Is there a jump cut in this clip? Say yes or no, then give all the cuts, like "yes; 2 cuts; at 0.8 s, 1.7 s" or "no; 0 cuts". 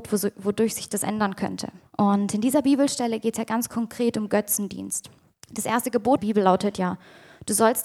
yes; 3 cuts; at 1.9 s, 5.3 s, 6.2 s